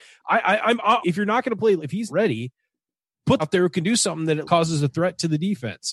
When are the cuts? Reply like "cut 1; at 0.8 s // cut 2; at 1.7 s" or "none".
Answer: cut 1; at 1.0 s // cut 2; at 1.8 s // cut 3; at 2.1 s // cut 4; at 3.4 s // cut 5; at 4.4 s